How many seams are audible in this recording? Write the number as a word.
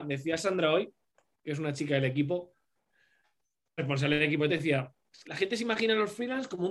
three